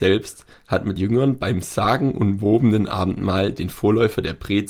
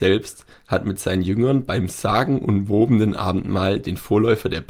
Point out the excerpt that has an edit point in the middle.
first; 1 cut; at 1.0 s

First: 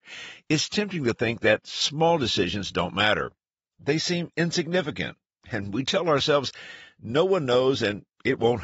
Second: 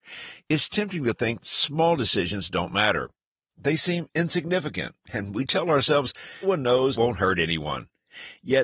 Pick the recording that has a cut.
second; 4 cuts; at 1.4 s, 5.0 s, 6.4 s, 6.9 s

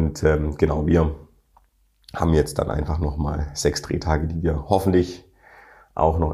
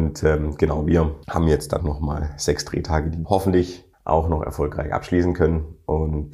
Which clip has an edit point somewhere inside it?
second; 4 cuts; at 1.2 s, 1.8 s, 3.2 s, 3.9 s

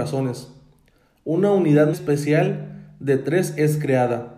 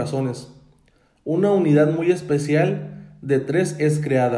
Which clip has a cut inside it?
first; 1 cut; at 1.9 s

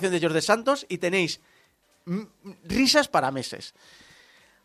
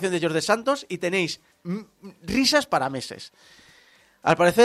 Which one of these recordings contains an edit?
second; 1 cut; at 1.5 s

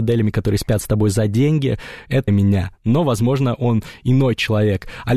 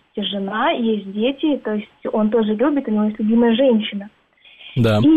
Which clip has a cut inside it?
first; 1 cut; at 2.3 s

